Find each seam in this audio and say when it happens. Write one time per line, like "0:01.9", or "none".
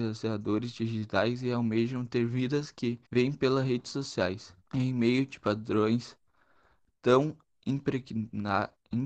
0:03.1
0:04.6